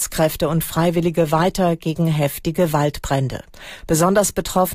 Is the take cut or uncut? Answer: uncut